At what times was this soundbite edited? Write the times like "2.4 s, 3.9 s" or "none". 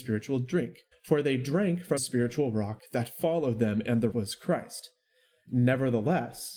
0.9 s, 2.0 s, 4.1 s